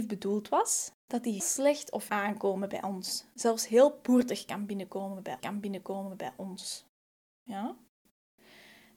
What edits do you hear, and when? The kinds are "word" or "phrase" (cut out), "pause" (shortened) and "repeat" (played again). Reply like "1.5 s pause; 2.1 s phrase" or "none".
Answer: 0.9 s pause; 1.4 s word; 2.1 s phrase; 5.4 s repeat